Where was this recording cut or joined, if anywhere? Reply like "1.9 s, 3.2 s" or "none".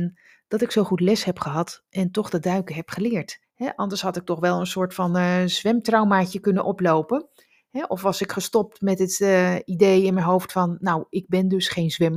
3.4 s